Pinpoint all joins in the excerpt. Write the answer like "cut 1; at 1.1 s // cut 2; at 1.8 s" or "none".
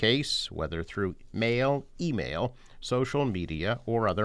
none